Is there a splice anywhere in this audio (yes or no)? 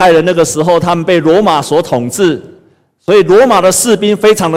no